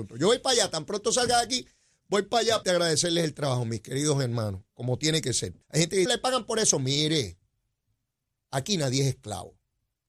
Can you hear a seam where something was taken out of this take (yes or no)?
yes